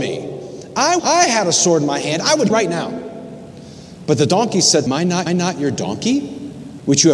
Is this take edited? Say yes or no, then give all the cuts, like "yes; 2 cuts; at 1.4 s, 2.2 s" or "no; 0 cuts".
yes; 4 cuts; at 1.0 s, 2.5 s, 4.9 s, 5.3 s